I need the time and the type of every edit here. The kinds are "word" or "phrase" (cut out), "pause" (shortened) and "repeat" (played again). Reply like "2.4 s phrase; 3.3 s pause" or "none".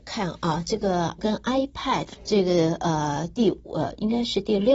1.2 s word; 2.2 s word